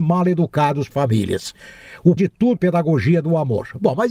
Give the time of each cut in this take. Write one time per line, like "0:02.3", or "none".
0:00.9
0:02.2
0:02.6